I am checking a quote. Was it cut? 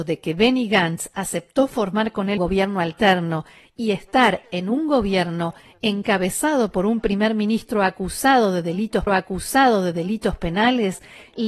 yes; 2 cuts; at 2.4 s, 9.1 s

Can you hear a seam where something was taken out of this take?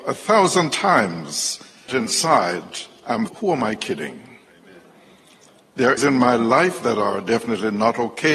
yes; 3 cuts; at 1.9 s, 3.3 s, 6.0 s

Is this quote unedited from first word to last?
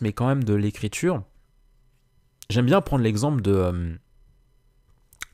yes; 0 cuts

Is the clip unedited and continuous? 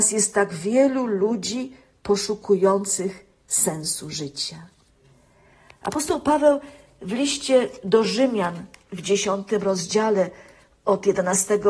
yes; 0 cuts

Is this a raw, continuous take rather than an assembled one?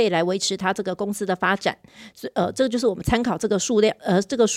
yes; 0 cuts

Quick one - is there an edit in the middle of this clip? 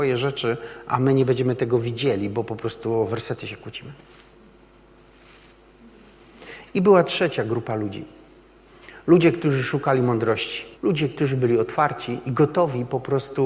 yes; 1 cut; at 10.7 s

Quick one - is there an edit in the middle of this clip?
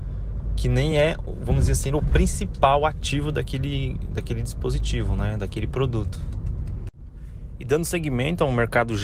no; 0 cuts

